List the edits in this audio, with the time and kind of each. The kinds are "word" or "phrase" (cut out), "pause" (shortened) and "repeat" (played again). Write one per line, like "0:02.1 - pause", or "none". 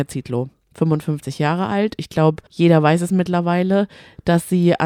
0:02.5 - pause